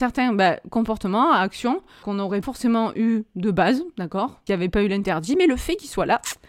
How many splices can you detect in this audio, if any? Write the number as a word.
three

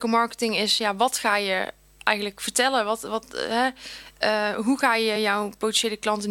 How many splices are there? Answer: zero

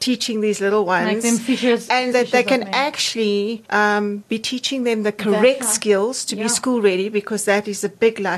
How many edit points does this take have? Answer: two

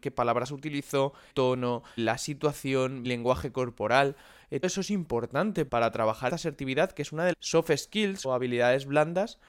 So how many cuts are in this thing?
eight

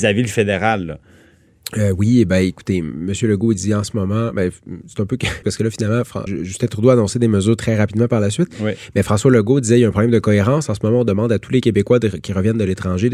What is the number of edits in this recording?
two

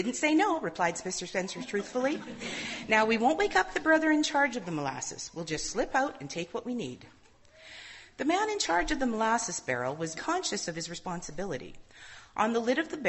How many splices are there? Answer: one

